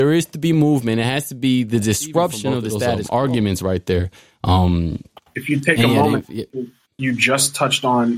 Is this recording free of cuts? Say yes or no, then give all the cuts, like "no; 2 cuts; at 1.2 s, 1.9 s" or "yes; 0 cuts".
yes; 0 cuts